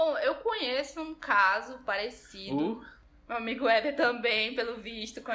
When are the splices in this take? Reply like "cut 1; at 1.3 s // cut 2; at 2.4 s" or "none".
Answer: none